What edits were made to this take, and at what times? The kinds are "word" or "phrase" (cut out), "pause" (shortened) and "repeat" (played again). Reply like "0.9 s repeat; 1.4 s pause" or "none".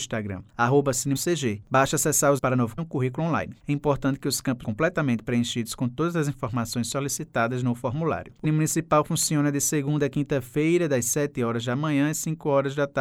1.2 s word; 2.4 s word; 2.8 s phrase; 4.6 s word; 8.4 s word